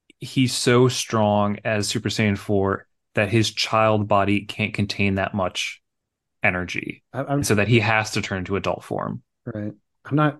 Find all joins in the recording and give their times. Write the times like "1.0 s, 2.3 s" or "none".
none